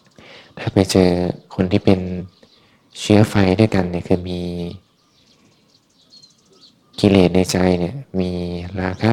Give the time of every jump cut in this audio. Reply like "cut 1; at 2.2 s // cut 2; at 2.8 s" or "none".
none